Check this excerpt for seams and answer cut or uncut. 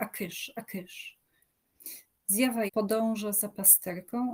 cut